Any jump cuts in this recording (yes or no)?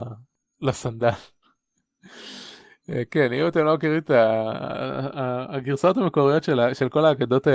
no